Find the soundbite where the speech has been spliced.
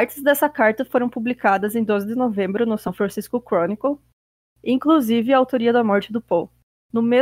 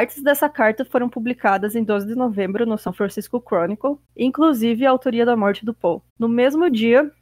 second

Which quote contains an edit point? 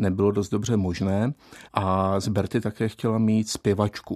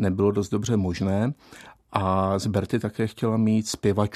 first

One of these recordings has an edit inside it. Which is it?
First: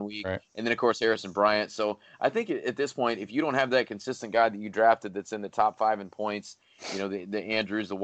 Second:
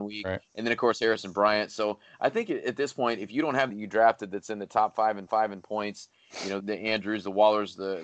second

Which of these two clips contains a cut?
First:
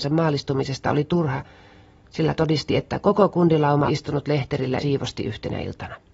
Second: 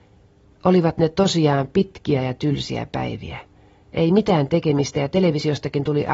first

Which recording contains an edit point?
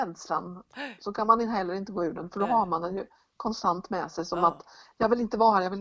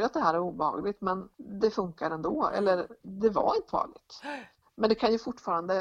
second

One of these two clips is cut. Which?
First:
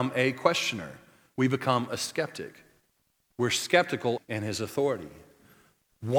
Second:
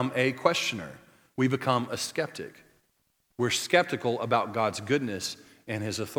first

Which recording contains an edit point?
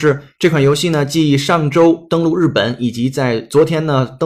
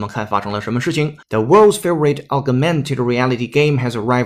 second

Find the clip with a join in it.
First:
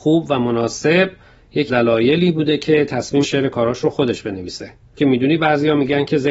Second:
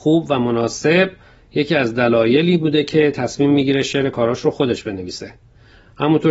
first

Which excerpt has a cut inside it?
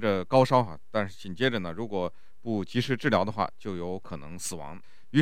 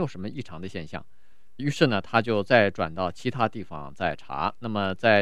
second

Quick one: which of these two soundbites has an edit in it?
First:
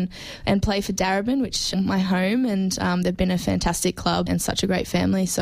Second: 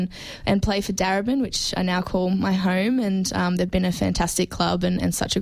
first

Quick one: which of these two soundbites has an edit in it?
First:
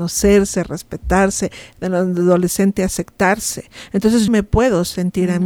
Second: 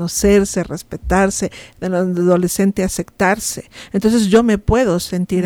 first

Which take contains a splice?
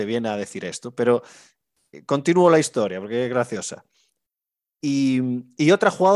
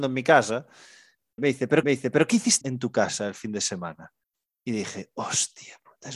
second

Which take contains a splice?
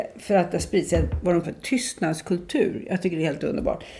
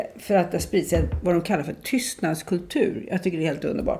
first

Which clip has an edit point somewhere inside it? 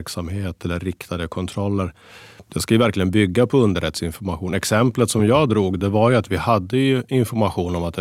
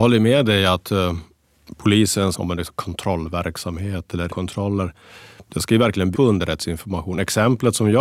second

